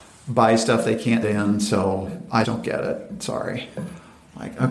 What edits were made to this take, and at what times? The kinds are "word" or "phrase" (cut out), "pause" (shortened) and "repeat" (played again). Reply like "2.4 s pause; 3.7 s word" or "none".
1.2 s word; 2.4 s word